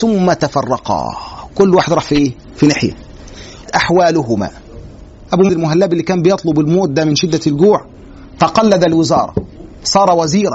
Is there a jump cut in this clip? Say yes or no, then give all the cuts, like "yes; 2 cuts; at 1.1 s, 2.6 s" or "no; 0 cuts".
yes; 2 cuts; at 3.7 s, 5.5 s